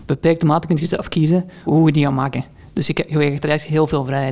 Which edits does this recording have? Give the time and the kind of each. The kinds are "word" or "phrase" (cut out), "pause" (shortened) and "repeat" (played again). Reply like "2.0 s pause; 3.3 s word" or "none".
1.7 s word